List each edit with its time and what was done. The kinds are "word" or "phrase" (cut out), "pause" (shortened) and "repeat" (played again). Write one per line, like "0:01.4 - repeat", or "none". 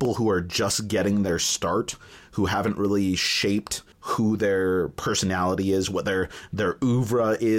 0:03.9 - pause